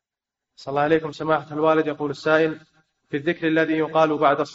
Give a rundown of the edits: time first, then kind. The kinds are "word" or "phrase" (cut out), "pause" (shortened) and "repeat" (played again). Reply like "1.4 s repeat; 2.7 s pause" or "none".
none

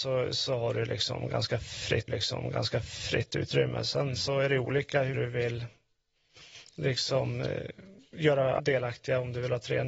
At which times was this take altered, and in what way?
2.1 s repeat; 5.1 s word; 8.6 s word

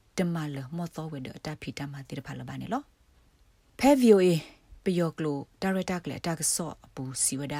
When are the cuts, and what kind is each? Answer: none

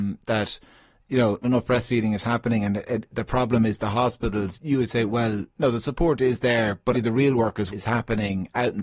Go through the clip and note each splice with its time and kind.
1.4 s word; 5.5 s pause; 6.9 s word; 7.7 s word

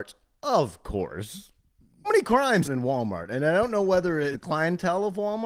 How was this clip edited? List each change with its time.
2.0 s word; 2.6 s word; 4.3 s word

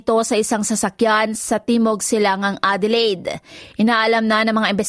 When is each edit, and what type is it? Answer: none

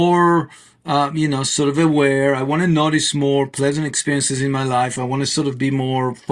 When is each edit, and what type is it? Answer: none

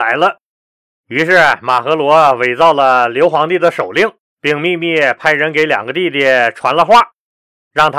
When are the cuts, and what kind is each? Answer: 4.2 s pause

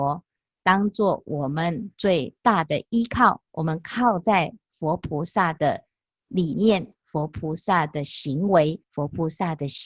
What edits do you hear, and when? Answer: 2.4 s pause; 3.5 s pause; 8.8 s pause

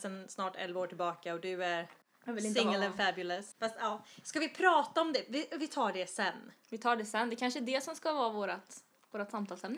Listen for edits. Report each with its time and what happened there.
6.6 s pause

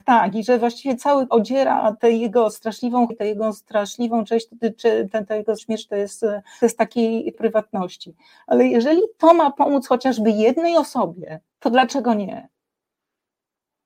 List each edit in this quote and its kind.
1.3 s word; 3.1 s word; 5.6 s word; 6.6 s word; 7.3 s word; 11.5 s pause

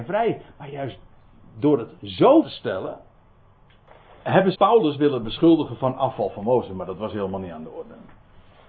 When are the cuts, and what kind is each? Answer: 2.4 s word; 4.5 s word

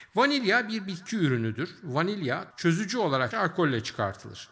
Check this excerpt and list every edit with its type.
2.5 s word; 3.3 s word

